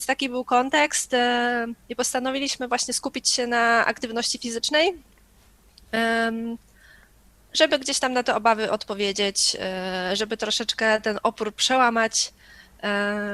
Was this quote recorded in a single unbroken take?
yes; 0 cuts

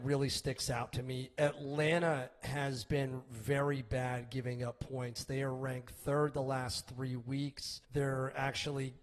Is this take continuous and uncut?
no; 1 cut; at 7.8 s

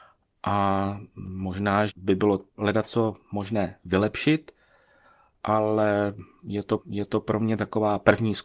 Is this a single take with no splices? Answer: no; 3 cuts; at 1.9 s, 2.5 s, 6.8 s

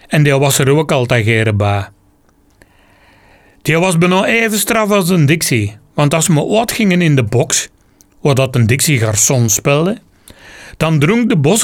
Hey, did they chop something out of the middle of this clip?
no; 0 cuts

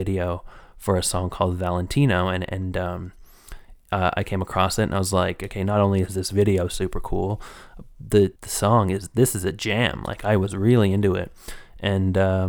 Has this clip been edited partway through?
yes; 1 cut; at 8.4 s

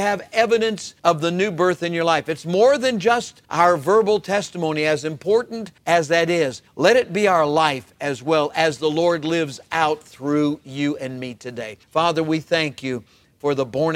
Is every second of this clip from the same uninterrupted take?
no; 5 cuts; at 1.0 s, 3.4 s, 5.8 s, 6.7 s, 11.8 s

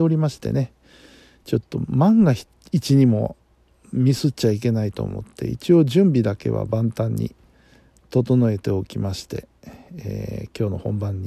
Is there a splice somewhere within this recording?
no; 0 cuts

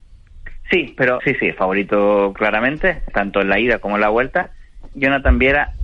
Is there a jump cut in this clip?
yes; 3 cuts; at 1.2 s, 3.1 s, 4.9 s

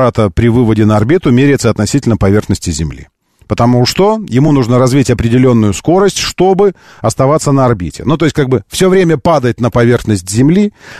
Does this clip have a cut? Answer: no; 0 cuts

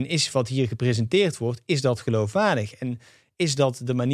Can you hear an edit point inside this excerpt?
no; 0 cuts

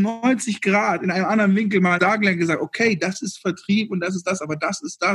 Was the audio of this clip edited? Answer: yes; 1 cut; at 2.0 s

